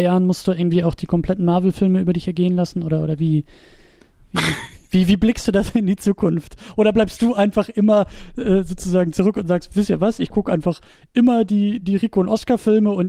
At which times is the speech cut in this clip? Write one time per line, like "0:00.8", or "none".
none